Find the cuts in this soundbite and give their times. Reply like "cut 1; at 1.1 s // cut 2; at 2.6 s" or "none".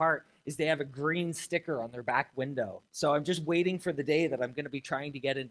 cut 1; at 2.9 s